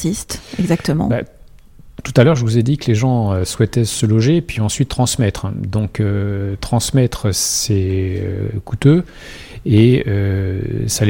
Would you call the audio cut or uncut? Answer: uncut